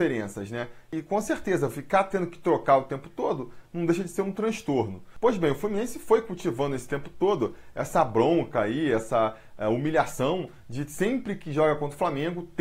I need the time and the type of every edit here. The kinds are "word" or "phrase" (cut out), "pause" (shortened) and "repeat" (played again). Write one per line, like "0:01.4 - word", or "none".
none